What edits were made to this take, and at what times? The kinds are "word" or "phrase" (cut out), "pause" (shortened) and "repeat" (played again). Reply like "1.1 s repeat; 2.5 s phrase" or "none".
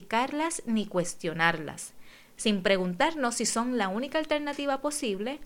none